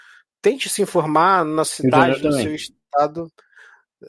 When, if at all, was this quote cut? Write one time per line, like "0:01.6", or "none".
0:01.7